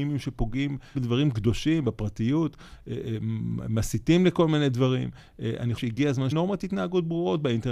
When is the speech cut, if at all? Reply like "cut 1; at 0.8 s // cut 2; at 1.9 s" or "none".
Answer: cut 1; at 0.9 s // cut 2; at 5.8 s // cut 3; at 6.3 s